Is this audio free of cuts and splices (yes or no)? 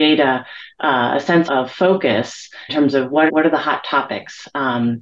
no